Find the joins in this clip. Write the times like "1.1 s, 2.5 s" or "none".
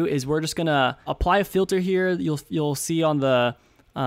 1.1 s